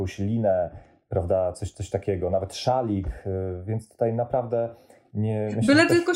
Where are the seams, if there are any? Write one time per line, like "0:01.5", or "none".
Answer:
none